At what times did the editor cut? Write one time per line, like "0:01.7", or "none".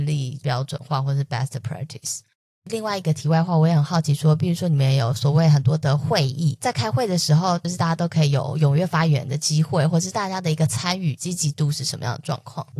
none